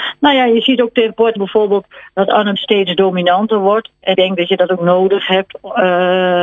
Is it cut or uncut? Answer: cut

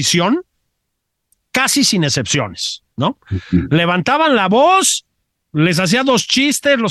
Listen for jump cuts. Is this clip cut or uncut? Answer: cut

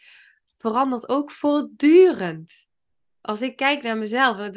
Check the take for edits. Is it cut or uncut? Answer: uncut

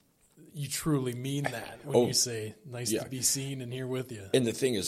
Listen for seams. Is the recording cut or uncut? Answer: uncut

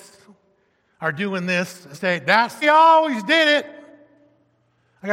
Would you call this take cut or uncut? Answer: cut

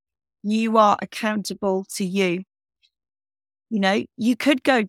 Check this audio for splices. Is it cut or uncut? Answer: uncut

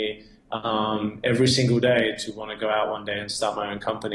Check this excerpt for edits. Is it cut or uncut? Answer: uncut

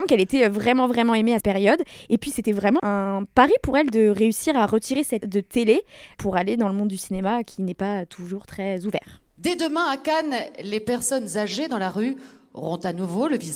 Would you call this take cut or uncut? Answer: cut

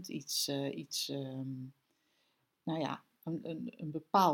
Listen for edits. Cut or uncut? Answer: uncut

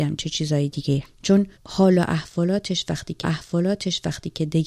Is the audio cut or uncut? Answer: cut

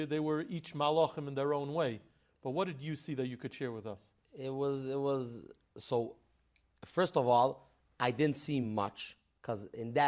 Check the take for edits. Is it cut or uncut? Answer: uncut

